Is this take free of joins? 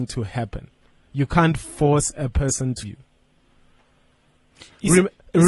no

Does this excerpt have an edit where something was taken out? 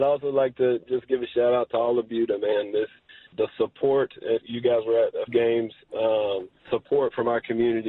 yes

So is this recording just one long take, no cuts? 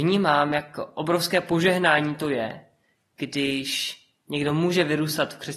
yes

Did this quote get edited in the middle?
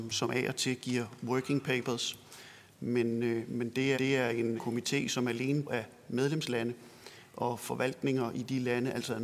yes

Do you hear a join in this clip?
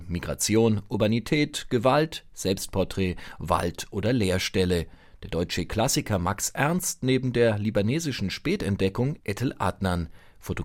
no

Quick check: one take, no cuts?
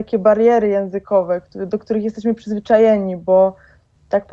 yes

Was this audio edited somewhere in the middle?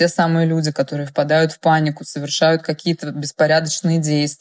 no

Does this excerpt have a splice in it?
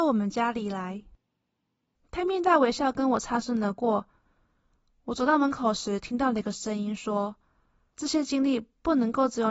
no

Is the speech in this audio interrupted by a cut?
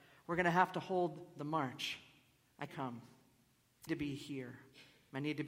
yes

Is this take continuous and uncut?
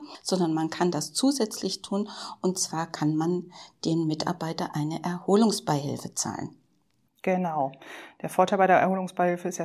yes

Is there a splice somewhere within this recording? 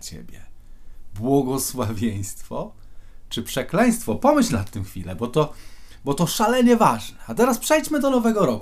no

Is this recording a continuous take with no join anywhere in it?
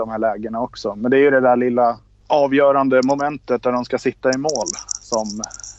yes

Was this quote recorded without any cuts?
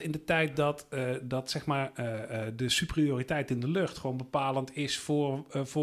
yes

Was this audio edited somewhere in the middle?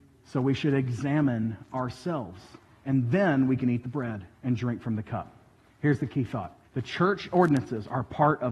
yes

